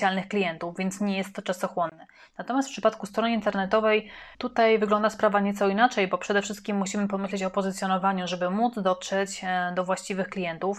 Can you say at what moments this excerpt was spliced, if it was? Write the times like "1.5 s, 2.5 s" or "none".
4.3 s